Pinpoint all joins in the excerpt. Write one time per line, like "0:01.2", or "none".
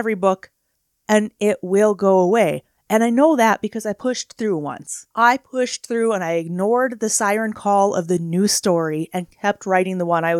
0:05.1

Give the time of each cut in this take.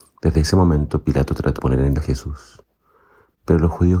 0:01.6
0:02.0

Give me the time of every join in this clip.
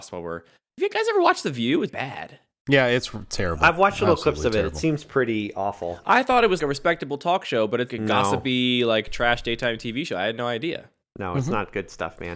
0:01.9
0:06.6
0:07.9

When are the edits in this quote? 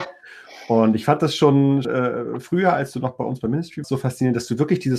0:01.8
0:03.8

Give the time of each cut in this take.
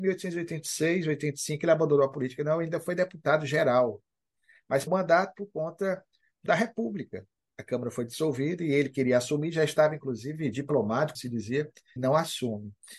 0:04.9
0:06.5
0:11.1
0:12.0

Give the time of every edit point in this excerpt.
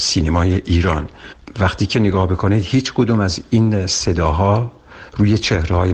none

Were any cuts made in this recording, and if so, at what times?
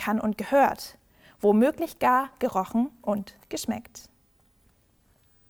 none

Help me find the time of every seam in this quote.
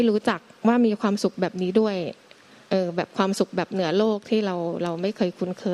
none

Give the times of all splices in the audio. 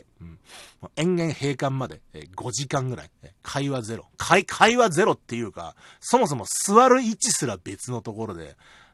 none

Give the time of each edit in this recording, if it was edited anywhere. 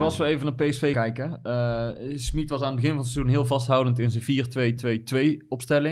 0:00.9

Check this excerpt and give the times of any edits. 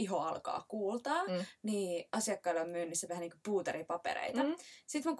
0:03.1

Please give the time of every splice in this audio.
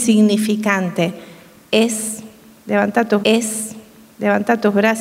0:03.2

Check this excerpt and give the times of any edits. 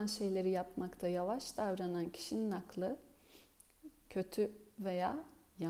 none

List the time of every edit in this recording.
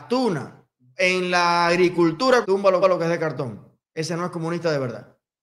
0:02.4
0:02.8
0:03.8

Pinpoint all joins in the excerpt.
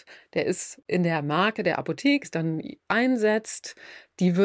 0:02.2

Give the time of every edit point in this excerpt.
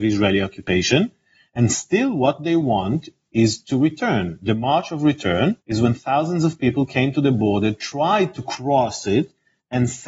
0:05.6

